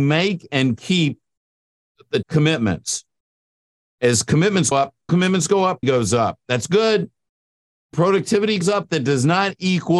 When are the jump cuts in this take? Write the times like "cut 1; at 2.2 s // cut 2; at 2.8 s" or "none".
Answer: cut 1; at 2.2 s // cut 2; at 4.7 s // cut 3; at 5.1 s // cut 4; at 5.8 s // cut 5; at 7.9 s // cut 6; at 8.6 s